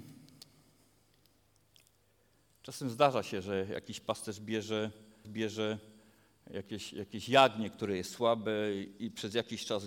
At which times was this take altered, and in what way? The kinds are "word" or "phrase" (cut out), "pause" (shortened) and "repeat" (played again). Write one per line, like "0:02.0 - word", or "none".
0:05.2 - repeat